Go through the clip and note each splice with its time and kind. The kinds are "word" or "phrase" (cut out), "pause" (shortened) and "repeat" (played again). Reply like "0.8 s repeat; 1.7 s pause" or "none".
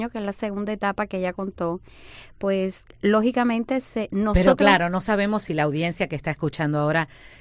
none